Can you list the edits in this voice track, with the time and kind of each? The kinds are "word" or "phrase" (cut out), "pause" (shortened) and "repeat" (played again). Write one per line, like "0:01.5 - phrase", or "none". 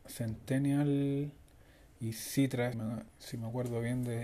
0:02.7 - word
0:03.1 - word